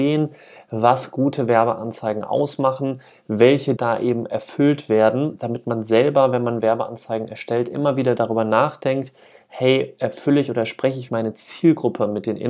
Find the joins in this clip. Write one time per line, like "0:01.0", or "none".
0:03.8
0:11.1